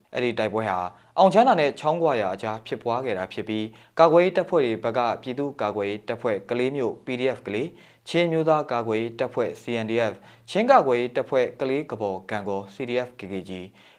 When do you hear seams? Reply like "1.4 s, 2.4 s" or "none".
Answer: none